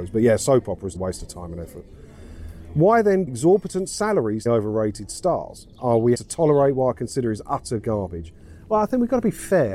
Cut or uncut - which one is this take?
cut